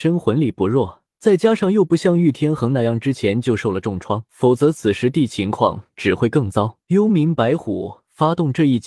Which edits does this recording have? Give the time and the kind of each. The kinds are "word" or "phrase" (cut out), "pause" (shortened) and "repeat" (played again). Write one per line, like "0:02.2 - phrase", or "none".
0:01.1 - pause
0:04.3 - pause
0:06.8 - pause

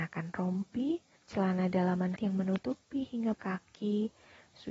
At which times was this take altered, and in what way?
0:01.2 - pause
0:02.1 - word
0:03.3 - word

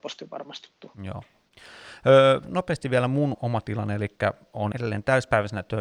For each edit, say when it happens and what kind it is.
0:00.9 - pause
0:03.3 - word
0:04.7 - word

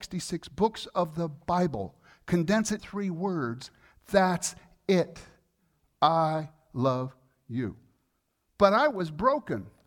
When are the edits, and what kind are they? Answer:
0:02.8 - phrase

